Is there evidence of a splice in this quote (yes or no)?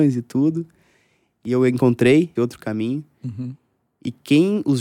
yes